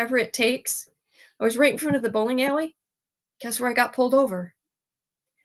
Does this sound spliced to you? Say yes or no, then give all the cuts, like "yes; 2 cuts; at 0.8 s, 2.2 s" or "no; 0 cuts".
no; 0 cuts